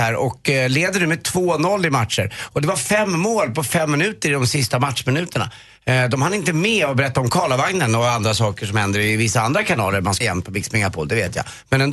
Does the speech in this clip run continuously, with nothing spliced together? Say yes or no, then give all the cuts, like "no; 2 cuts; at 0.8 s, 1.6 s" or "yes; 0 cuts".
no; 1 cut; at 10.2 s